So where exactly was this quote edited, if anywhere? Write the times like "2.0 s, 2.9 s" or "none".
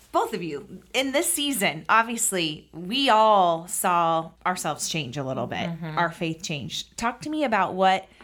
4.4 s